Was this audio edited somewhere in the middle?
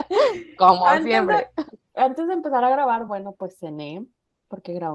no; 0 cuts

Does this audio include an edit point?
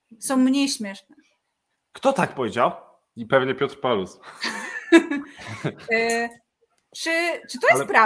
no; 0 cuts

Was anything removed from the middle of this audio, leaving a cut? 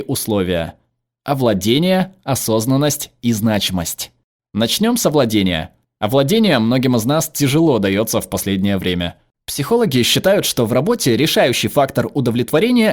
no; 0 cuts

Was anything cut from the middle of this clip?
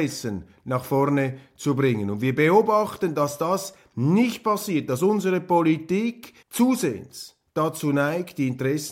yes; 1 cut; at 6.4 s

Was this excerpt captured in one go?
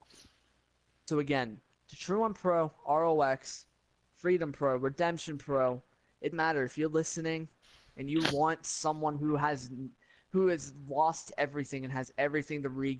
no; 1 cut; at 6.3 s

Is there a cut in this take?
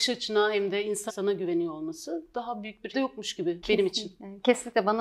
yes; 3 cuts; at 1.1 s, 2.9 s, 3.6 s

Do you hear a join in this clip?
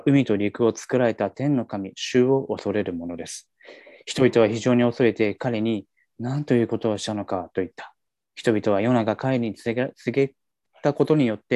no; 0 cuts

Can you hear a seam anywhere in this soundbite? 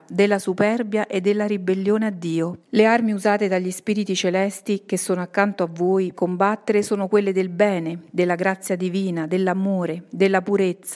yes; 2 cuts; at 2.6 s, 6.1 s

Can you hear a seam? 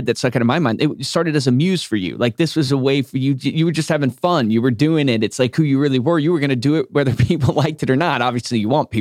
no; 0 cuts

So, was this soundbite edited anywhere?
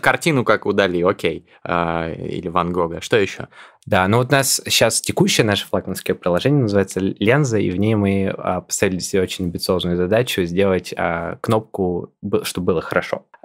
no; 0 cuts

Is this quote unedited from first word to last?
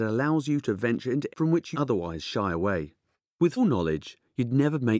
no; 3 cuts; at 1.3 s, 1.7 s, 3.6 s

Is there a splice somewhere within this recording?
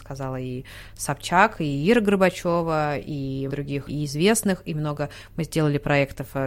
yes; 2 cuts; at 3.5 s, 3.9 s

